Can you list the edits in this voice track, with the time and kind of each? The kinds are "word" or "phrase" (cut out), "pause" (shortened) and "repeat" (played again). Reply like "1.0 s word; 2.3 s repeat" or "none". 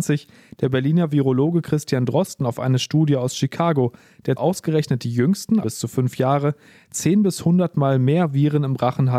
4.4 s word; 5.6 s word